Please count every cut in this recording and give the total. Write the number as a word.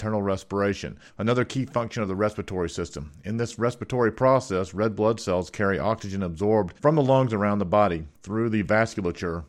three